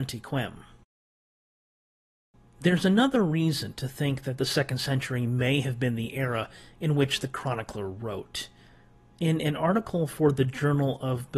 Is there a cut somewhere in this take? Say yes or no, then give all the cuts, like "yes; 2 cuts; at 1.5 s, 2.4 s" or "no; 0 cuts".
no; 0 cuts